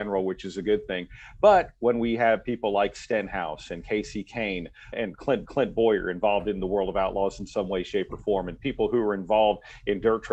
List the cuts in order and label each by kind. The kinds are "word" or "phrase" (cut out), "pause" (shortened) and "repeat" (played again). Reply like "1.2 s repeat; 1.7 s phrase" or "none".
4.9 s word; 5.5 s repeat